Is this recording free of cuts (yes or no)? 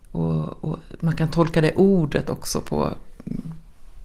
yes